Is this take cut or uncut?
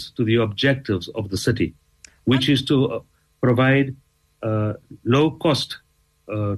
uncut